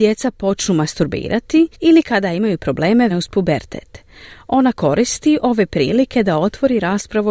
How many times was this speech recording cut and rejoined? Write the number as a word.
two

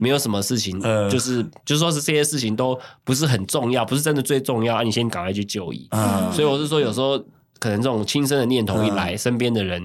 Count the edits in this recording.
zero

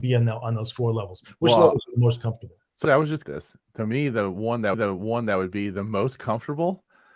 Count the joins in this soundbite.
three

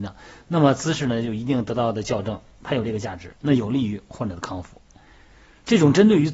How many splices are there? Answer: one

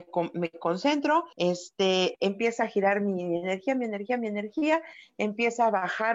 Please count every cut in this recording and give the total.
one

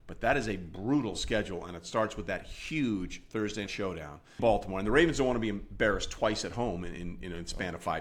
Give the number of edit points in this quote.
two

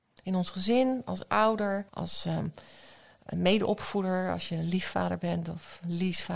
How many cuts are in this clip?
one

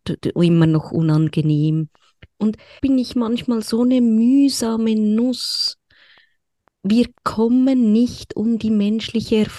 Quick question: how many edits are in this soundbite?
one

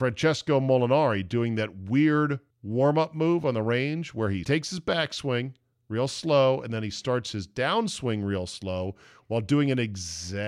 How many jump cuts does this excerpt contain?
two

